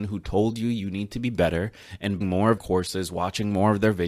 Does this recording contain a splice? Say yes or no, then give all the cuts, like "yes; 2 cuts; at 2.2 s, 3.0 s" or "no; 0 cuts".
yes; 2 cuts; at 2.2 s, 2.6 s